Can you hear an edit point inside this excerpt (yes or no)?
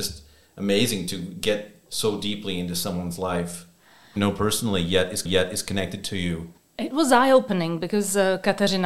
yes